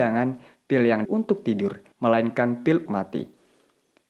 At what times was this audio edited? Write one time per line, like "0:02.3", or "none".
0:01.0
0:01.9
0:02.9